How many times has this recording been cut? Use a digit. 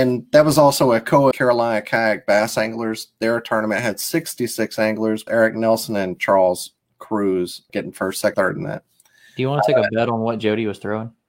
4